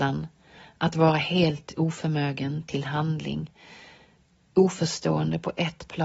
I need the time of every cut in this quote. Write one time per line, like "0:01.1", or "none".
none